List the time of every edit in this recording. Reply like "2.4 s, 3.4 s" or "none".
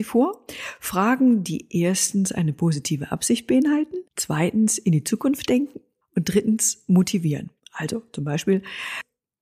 4.1 s, 6.0 s, 7.6 s